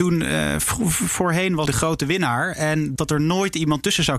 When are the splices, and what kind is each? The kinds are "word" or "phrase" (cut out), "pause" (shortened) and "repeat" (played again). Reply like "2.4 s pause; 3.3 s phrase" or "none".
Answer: 1.7 s word; 3.0 s word